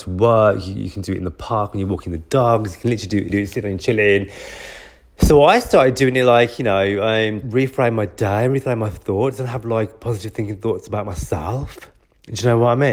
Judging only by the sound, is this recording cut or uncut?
cut